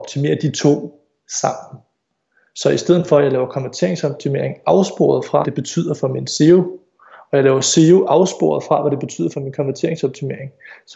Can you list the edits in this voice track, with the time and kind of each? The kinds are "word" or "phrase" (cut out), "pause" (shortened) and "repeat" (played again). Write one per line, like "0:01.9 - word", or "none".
0:05.4 - word